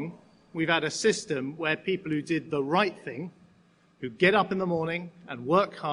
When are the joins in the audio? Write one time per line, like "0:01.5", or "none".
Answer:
none